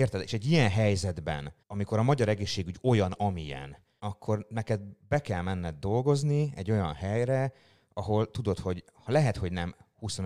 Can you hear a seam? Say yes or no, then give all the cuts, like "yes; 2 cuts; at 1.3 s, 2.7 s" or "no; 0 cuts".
yes; 2 cuts; at 1.6 s, 4.0 s